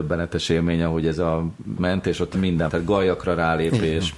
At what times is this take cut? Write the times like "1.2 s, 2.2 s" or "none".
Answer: 1.8 s, 2.3 s, 2.7 s

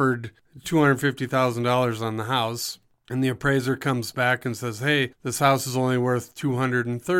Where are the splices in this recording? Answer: none

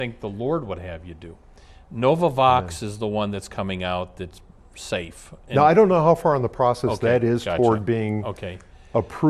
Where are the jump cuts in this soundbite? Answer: none

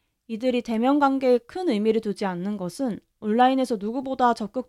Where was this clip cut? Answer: none

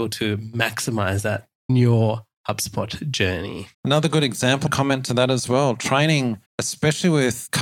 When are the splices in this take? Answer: 1.7 s, 3.7 s, 4.7 s, 6.5 s

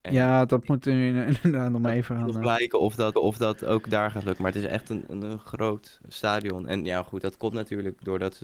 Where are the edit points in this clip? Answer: 3.1 s, 5.1 s, 6.1 s

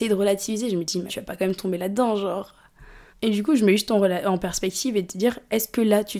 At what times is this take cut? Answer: 1.1 s, 3.1 s

